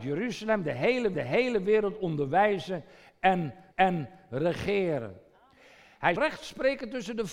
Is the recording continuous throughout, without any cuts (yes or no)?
no